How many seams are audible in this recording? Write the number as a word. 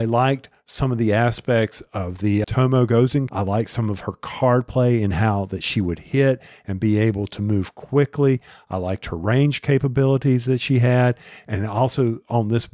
two